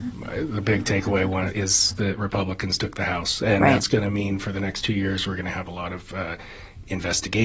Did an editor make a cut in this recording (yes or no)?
yes